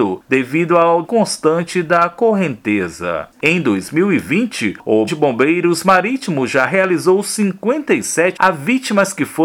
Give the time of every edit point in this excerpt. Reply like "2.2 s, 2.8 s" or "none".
1.0 s, 5.1 s, 8.4 s